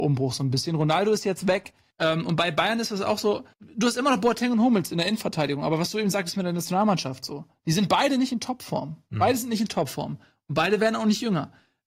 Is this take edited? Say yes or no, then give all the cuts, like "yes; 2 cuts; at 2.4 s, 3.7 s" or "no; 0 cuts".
yes; 2 cuts; at 1.9 s, 3.5 s